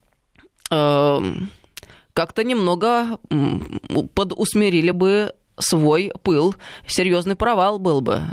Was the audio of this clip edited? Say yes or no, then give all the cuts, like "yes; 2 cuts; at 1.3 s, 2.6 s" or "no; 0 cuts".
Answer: no; 0 cuts